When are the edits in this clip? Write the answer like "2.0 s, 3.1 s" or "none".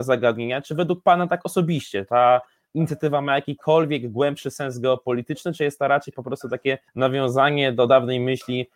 6.9 s